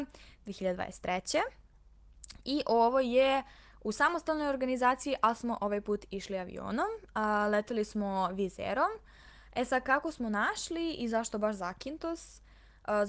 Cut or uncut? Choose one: uncut